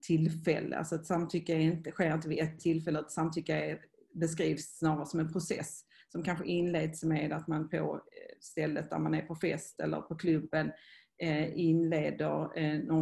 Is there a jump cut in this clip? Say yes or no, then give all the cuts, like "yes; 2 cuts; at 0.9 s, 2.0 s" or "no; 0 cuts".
no; 0 cuts